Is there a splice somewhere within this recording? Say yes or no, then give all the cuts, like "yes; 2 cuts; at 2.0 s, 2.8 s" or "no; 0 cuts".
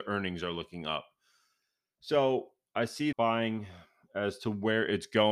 yes; 1 cut; at 3.1 s